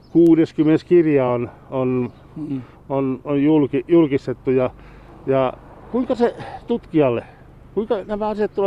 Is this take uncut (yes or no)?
yes